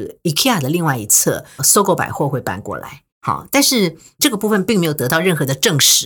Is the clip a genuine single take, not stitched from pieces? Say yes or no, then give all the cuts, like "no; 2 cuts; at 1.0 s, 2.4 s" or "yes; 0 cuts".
no; 3 cuts; at 1.6 s, 3.1 s, 4.2 s